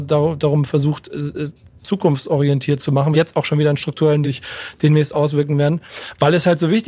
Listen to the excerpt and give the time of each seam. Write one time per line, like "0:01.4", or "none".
0:01.8
0:03.1
0:04.2